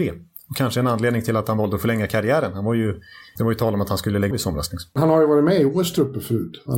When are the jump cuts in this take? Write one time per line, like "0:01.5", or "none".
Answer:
0:03.4
0:04.3